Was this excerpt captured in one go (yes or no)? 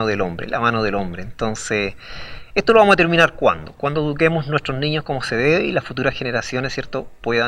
yes